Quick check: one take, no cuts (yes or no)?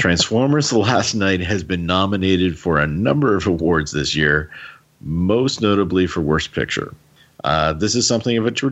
yes